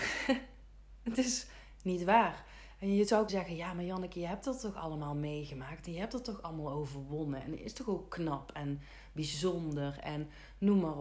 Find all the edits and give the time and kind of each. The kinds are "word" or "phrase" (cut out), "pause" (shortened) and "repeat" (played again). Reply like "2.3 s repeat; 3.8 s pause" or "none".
3.3 s word